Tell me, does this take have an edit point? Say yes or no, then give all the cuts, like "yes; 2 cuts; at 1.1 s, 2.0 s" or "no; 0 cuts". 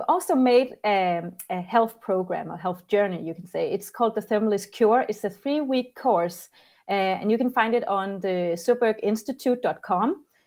no; 0 cuts